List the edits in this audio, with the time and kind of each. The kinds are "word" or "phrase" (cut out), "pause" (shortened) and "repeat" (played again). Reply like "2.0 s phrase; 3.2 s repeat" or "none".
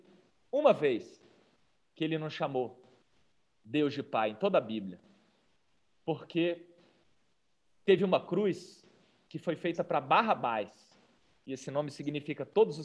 none